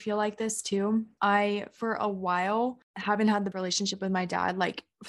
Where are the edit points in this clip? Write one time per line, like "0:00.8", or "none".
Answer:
0:03.5